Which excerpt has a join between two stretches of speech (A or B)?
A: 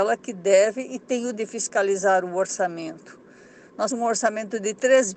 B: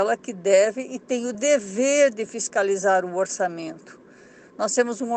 A